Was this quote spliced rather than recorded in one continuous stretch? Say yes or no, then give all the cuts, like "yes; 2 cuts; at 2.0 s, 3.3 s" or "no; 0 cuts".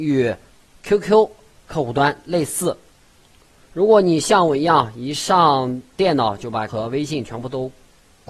yes; 1 cut; at 6.7 s